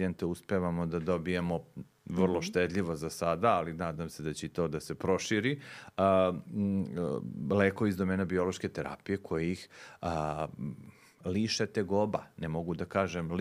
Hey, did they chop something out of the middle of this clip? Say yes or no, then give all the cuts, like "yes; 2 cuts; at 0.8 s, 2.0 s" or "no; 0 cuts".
no; 0 cuts